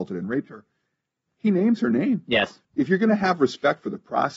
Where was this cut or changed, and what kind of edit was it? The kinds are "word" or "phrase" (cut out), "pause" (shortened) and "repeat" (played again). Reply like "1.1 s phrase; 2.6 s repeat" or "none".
2.6 s pause